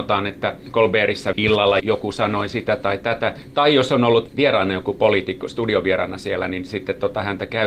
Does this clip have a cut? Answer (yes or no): yes